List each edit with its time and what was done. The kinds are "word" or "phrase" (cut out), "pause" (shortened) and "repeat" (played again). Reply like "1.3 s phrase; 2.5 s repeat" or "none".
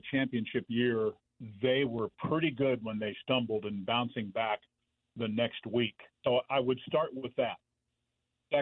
6.1 s pause